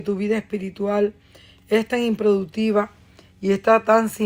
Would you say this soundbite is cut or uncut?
uncut